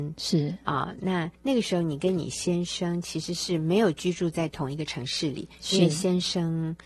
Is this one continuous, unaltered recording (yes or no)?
no